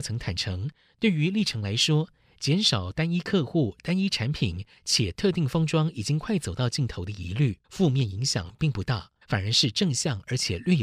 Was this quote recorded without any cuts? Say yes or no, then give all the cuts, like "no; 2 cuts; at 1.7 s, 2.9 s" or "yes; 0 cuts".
no; 2 cuts; at 7.6 s, 9.2 s